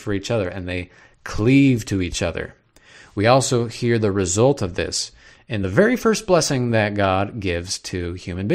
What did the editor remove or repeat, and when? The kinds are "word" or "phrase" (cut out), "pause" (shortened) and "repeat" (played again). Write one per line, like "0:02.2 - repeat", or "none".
none